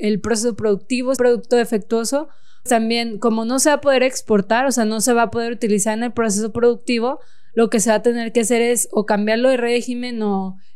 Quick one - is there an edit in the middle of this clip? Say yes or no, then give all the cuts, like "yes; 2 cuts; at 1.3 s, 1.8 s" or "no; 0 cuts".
yes; 2 cuts; at 1.2 s, 2.7 s